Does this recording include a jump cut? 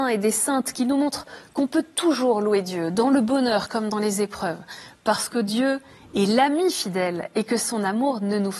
no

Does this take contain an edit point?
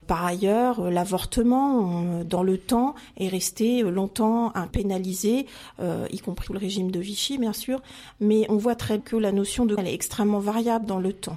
yes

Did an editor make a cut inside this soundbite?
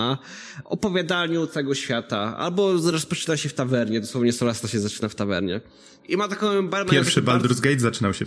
no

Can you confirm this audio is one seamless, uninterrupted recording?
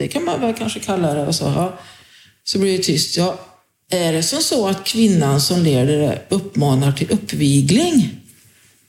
yes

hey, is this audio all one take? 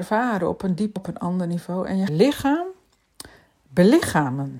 no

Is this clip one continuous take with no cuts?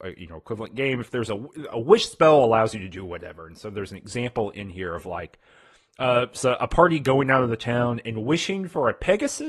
yes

